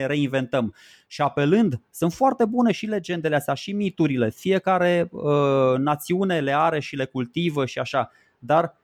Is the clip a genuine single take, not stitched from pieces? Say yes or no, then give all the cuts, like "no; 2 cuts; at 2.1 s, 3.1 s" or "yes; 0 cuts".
yes; 0 cuts